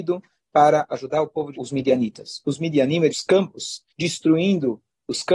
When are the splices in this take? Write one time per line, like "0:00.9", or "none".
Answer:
0:01.5
0:03.1
0:03.9